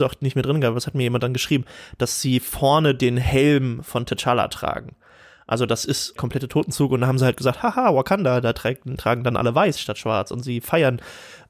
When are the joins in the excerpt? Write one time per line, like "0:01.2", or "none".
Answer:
0:06.2